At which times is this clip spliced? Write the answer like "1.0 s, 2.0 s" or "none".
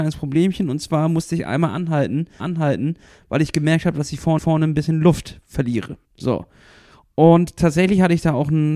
2.4 s, 4.4 s, 6.0 s